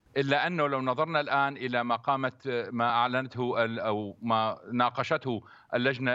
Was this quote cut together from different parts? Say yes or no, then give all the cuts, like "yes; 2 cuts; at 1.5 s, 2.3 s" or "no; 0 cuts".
no; 0 cuts